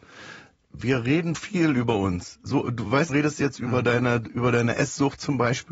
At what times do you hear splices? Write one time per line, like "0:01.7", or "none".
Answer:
0:01.3
0:03.1